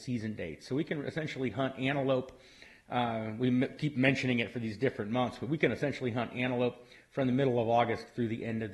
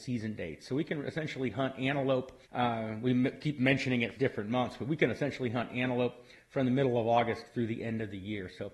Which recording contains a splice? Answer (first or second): second